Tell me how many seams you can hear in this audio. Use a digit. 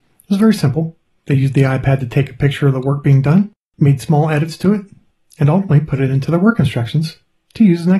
0